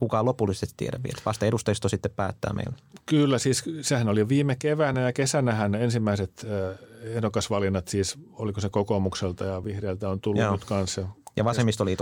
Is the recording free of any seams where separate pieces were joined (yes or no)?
yes